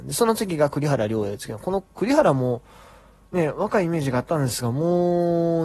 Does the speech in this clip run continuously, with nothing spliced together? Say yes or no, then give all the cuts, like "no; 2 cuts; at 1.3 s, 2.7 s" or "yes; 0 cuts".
yes; 0 cuts